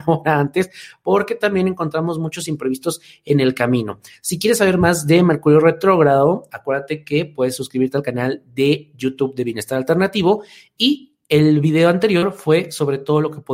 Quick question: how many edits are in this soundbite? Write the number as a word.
zero